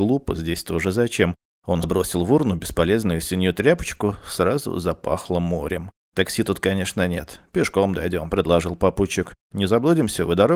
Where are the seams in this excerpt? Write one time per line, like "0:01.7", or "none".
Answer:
0:01.8